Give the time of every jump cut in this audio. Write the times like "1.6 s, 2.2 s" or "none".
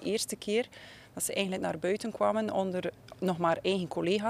none